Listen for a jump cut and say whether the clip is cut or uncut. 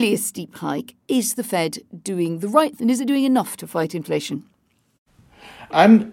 cut